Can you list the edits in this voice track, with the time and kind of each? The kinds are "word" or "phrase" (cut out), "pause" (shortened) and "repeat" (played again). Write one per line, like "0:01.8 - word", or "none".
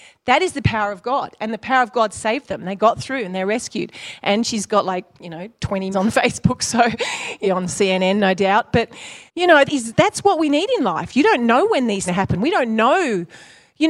0:05.1 - pause
0:05.9 - phrase
0:07.4 - phrase
0:09.3 - pause
0:09.7 - phrase
0:12.1 - phrase